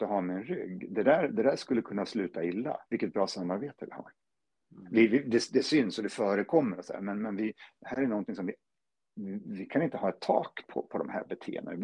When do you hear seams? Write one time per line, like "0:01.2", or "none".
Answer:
0:02.9